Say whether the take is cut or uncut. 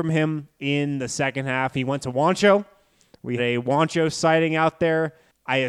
cut